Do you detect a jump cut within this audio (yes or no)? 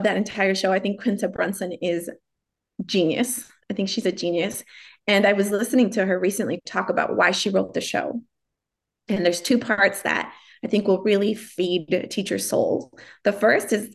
no